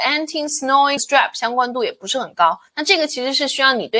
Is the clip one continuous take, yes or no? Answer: no